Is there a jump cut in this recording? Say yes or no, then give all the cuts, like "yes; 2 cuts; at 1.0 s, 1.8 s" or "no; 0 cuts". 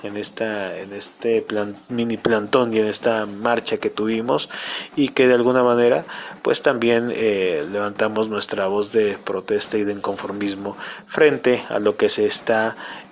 no; 0 cuts